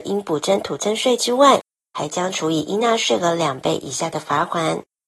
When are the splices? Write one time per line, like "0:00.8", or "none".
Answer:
none